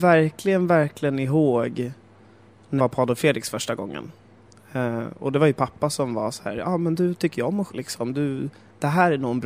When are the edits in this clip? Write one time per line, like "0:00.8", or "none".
0:02.8
0:07.7